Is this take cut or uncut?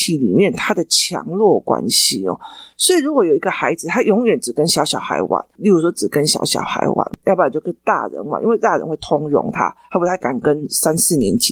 cut